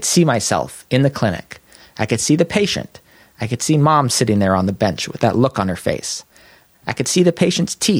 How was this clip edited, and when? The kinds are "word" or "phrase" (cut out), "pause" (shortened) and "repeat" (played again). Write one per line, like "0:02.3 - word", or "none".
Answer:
none